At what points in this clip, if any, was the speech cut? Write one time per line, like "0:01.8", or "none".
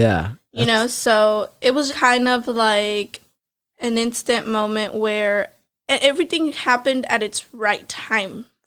0:01.9